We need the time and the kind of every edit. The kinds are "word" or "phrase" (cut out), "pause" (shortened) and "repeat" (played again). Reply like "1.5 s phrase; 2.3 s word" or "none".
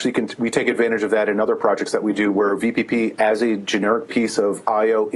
none